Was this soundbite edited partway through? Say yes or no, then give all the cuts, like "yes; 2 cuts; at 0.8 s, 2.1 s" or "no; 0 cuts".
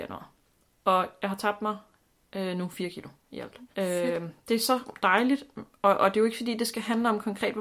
yes; 1 cut; at 3.7 s